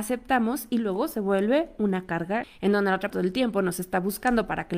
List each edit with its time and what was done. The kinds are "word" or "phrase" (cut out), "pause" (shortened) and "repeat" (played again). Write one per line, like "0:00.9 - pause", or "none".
0:02.4 - word
0:03.1 - word